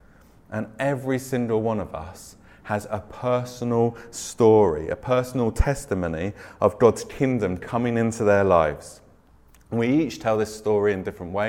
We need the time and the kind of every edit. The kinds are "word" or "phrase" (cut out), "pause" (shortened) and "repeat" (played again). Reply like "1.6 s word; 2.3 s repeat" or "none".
none